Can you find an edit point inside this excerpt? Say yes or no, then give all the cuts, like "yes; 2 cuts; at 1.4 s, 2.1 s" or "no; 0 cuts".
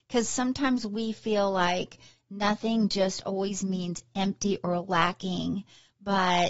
no; 0 cuts